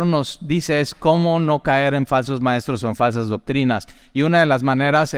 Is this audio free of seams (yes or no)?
yes